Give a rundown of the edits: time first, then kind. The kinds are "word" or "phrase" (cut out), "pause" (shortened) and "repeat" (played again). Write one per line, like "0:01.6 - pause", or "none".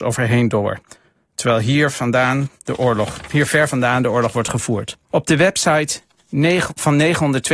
0:02.6 - pause
0:05.0 - pause